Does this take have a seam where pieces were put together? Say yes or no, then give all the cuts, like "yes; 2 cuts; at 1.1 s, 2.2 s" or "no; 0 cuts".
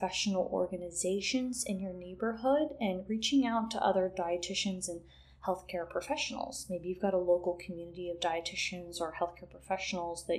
no; 0 cuts